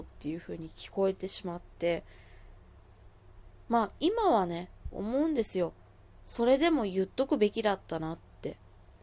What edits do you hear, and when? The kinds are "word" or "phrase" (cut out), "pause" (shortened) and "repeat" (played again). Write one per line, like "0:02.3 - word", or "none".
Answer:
none